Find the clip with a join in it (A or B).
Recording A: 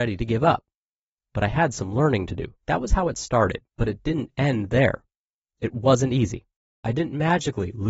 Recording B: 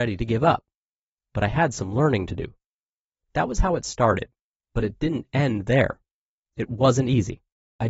A